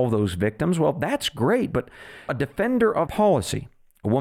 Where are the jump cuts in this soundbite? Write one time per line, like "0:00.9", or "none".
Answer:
0:02.3
0:03.1